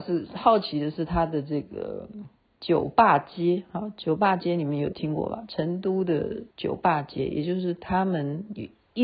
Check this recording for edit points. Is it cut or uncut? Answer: cut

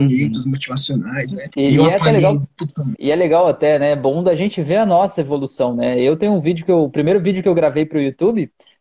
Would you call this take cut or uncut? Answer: cut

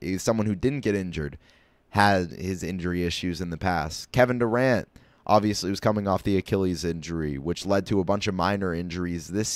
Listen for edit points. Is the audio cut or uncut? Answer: uncut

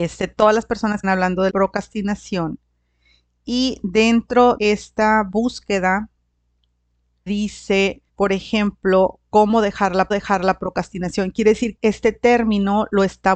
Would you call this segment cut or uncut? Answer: cut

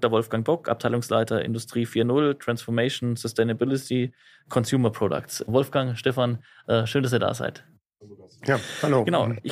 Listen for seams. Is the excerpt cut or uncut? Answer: uncut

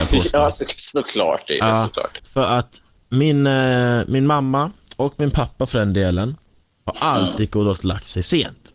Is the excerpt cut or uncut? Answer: uncut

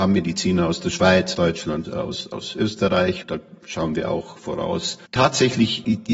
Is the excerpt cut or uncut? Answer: cut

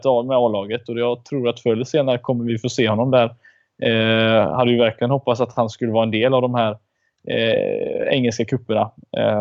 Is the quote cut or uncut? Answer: uncut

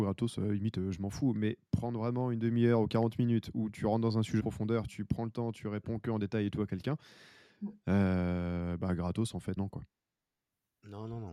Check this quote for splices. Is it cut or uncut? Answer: cut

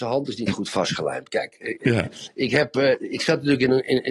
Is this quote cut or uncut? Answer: uncut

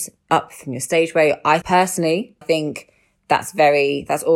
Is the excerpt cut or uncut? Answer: cut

